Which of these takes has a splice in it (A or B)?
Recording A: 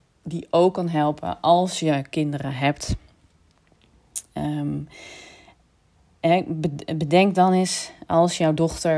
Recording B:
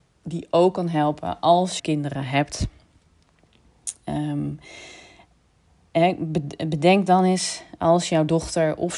B